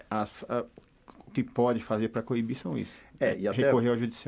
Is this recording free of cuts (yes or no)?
no